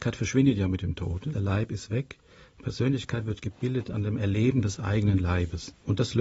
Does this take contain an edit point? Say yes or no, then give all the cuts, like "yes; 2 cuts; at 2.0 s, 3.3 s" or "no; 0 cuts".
no; 0 cuts